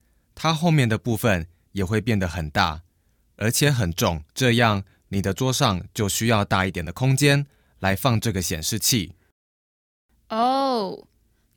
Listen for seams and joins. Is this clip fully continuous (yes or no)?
no